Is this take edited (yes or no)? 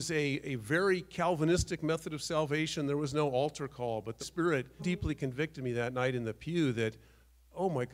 yes